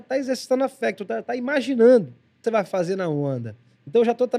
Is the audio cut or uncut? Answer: cut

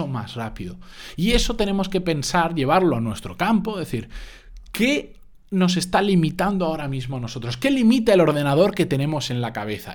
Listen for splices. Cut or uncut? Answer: uncut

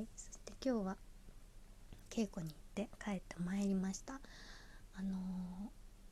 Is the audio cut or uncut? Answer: cut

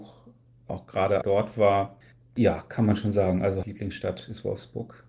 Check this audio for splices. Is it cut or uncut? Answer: cut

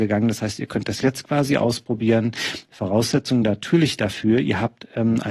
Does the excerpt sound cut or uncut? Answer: uncut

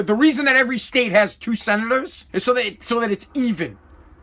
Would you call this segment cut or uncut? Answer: cut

